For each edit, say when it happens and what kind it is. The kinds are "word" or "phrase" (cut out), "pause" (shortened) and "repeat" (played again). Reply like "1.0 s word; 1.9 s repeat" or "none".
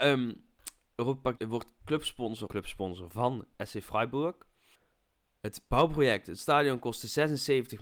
1.4 s word; 2.5 s phrase; 3.5 s pause; 4.7 s pause